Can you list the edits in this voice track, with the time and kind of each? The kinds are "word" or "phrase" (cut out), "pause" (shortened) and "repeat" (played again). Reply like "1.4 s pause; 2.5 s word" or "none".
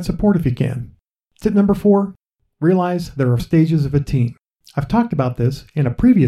3.4 s word